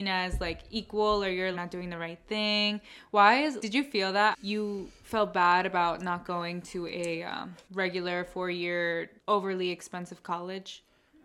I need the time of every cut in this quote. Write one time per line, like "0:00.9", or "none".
0:01.5
0:03.6
0:04.3
0:07.6
0:09.2